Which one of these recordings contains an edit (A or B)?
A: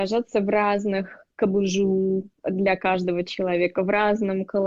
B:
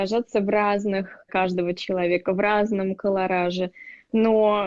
B